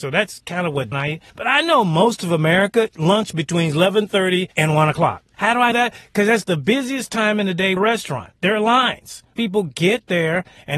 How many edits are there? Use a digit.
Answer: 8